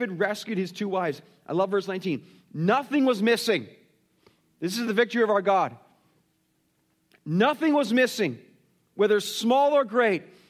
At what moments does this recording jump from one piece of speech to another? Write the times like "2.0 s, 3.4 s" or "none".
none